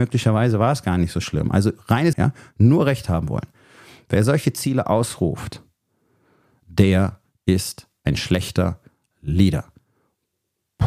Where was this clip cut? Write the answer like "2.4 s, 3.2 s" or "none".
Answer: 2.1 s